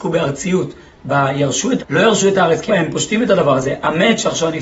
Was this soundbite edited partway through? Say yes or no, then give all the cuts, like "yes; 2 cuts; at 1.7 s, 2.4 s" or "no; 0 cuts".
yes; 2 cuts; at 1.8 s, 2.7 s